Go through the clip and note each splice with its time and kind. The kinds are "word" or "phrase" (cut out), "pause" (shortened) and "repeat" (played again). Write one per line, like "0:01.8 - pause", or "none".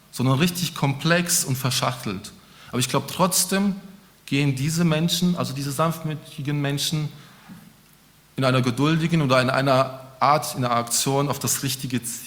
none